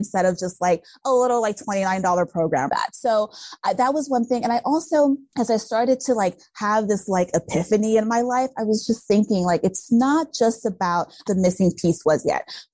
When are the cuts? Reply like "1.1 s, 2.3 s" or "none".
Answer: 2.7 s, 11.3 s